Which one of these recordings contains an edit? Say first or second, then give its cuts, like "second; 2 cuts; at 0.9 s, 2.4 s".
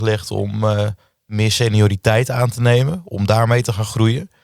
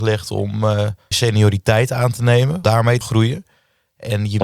second; 3 cuts; at 1.1 s, 2.6 s, 3.0 s